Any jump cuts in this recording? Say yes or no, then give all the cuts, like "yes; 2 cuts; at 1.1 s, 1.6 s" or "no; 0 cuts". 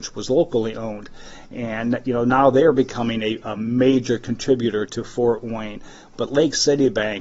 yes; 1 cut; at 4.9 s